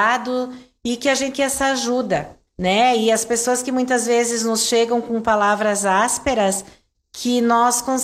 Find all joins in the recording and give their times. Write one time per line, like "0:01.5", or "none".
0:01.3
0:02.5